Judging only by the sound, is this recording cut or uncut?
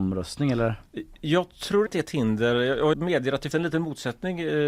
cut